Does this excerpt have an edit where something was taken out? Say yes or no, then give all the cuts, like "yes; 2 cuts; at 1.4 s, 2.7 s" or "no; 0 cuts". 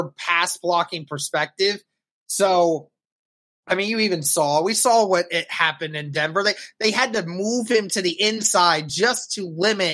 no; 0 cuts